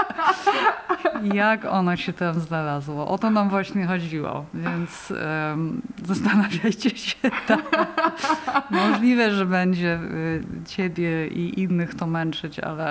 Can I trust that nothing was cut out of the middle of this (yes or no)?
yes